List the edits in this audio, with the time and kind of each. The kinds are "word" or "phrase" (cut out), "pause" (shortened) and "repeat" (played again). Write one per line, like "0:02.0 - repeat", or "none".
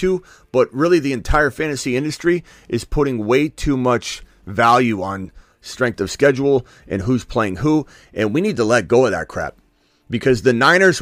none